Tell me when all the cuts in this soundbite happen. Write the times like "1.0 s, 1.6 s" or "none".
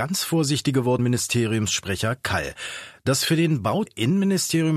1.0 s, 3.9 s